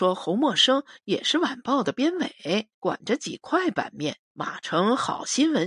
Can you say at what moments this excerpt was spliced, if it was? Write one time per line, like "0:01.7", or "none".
0:02.7
0:04.2